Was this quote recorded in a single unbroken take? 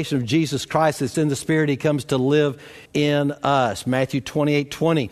no; 2 cuts; at 1.1 s, 2.9 s

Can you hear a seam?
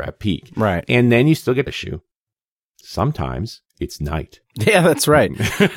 yes; 2 cuts; at 1.7 s, 3.7 s

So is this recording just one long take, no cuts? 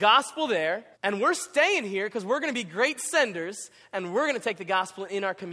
no; 1 cut; at 0.9 s

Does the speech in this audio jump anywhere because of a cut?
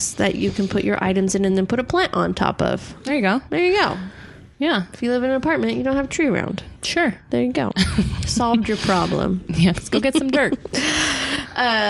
no; 0 cuts

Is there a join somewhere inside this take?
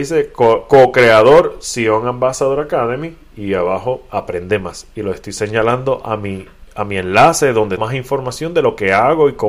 yes; 1 cut; at 7.8 s

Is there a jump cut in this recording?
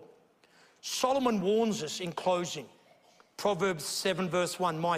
no; 0 cuts

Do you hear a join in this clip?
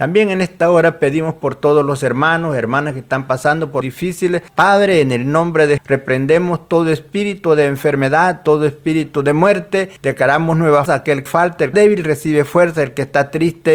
yes; 7 cuts; at 3.8 s, 4.5 s, 5.8 s, 10.0 s, 10.9 s, 11.3 s, 11.7 s

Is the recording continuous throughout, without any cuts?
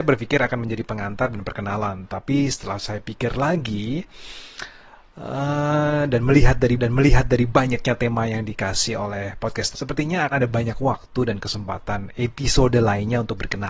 no; 3 cuts; at 6.8 s, 9.7 s, 10.3 s

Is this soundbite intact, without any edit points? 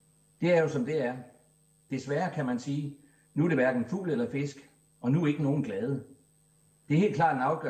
yes; 0 cuts

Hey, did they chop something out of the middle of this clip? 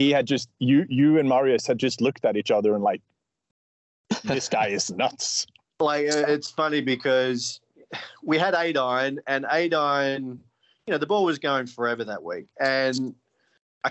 no; 0 cuts

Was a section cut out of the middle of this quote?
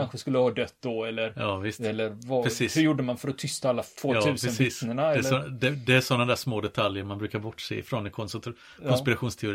yes; 1 cut; at 3.9 s

